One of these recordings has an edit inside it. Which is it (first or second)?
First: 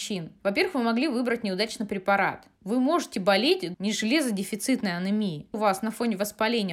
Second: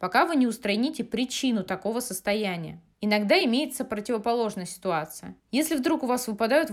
first